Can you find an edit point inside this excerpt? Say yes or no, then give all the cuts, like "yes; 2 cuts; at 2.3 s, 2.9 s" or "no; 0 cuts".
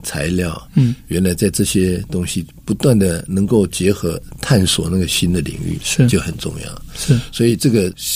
no; 0 cuts